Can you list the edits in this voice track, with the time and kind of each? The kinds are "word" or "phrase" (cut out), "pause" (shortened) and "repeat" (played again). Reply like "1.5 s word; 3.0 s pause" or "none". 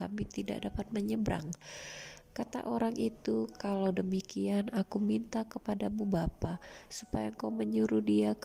none